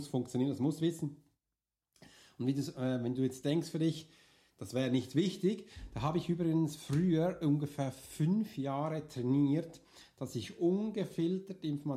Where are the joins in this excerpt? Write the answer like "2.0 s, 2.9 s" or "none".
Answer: none